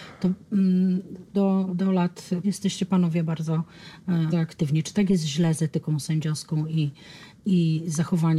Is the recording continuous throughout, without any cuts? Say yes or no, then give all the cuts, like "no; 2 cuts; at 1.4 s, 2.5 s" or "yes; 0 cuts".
no; 4 cuts; at 1.3 s, 1.7 s, 2.4 s, 4.3 s